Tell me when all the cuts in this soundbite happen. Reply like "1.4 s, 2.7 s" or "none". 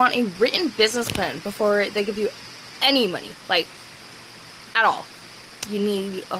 none